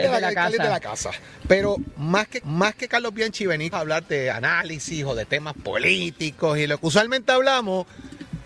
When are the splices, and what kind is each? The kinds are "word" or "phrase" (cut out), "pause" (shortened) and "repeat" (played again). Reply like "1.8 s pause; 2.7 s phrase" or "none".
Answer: 2.4 s repeat; 3.7 s word